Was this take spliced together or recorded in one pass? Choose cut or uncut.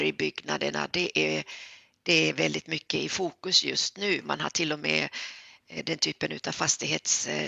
uncut